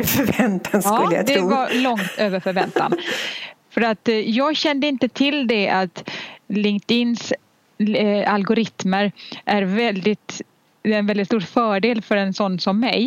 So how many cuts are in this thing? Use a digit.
0